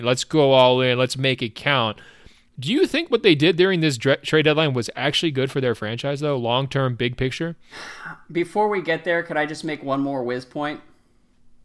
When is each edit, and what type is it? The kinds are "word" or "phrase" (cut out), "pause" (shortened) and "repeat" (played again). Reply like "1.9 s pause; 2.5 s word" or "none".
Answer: none